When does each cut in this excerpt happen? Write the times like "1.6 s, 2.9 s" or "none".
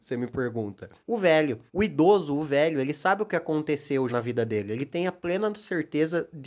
1.0 s, 1.7 s, 4.1 s